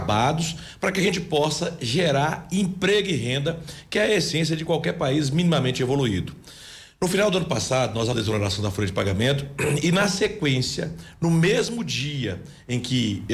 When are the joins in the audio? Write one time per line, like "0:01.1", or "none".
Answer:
0:08.1